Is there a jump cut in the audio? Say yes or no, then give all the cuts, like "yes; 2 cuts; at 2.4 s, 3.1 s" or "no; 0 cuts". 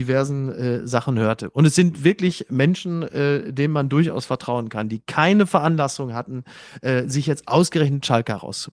no; 0 cuts